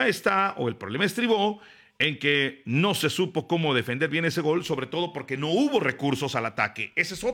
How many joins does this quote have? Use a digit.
0